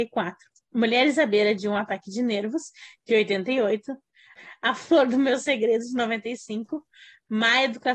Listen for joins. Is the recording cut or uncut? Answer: uncut